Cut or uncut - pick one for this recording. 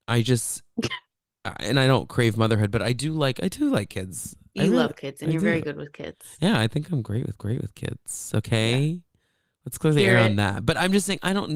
cut